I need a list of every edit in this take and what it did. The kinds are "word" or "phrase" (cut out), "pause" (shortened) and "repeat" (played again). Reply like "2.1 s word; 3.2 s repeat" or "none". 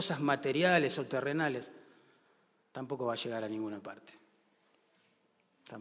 none